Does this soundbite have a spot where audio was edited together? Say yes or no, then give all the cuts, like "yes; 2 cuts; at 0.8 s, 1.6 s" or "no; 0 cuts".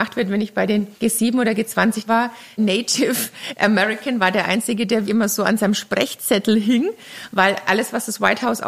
yes; 4 cuts; at 1.0 s, 2.1 s, 2.6 s, 5.0 s